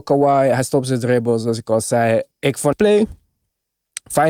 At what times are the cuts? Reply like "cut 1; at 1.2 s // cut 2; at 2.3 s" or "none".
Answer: cut 1; at 2.3 s // cut 2; at 2.7 s